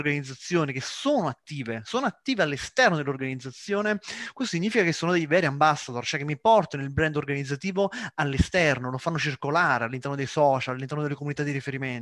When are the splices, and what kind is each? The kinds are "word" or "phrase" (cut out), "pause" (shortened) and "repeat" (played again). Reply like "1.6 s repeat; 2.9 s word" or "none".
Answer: none